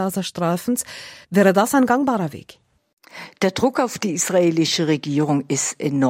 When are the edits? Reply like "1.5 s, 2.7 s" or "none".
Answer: 1.2 s